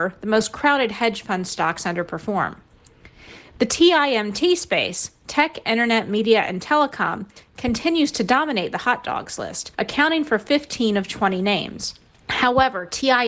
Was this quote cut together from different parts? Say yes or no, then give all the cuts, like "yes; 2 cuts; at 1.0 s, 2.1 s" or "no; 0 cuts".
yes; 2 cuts; at 9.7 s, 12.1 s